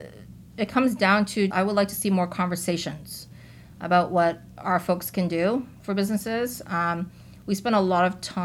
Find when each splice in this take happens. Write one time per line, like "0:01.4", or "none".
0:01.5